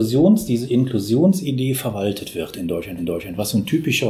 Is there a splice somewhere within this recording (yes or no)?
yes